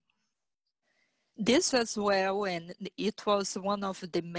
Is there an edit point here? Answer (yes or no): yes